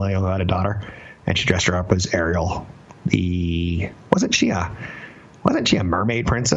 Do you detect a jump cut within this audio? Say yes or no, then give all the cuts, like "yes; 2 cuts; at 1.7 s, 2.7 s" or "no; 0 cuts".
no; 0 cuts